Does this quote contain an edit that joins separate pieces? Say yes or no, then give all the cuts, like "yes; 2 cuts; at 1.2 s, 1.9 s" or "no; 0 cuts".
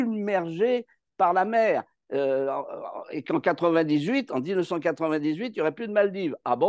no; 0 cuts